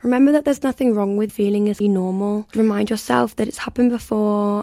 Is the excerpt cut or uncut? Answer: cut